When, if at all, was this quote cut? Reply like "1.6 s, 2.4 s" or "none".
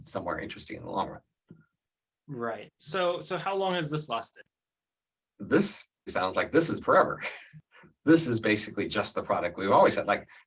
2.7 s, 6.1 s, 6.8 s